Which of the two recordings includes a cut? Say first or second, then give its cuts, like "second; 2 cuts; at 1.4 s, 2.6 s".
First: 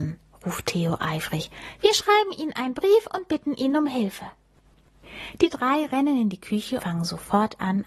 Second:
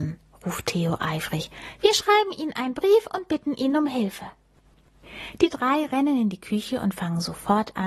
first; 1 cut; at 6.8 s